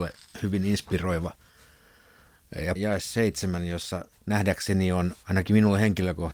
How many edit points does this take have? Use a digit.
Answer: 1